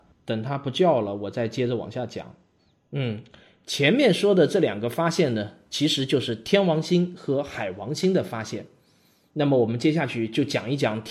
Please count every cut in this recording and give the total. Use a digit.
0